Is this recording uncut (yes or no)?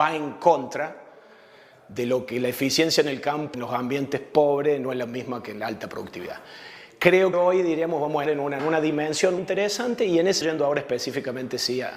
no